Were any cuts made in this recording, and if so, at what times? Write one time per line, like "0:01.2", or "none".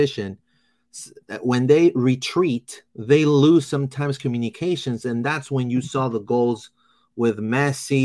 0:02.9